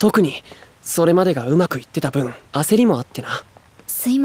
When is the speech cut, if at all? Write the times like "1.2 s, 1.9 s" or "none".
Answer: 2.4 s